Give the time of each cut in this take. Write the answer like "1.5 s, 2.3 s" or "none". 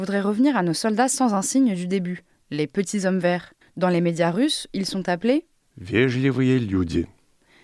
3.6 s